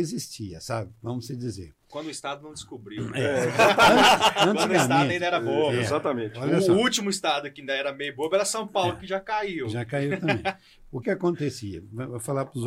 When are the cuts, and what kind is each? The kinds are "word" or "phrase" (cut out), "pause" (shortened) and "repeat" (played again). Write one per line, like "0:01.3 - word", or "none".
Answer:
0:11.0 - word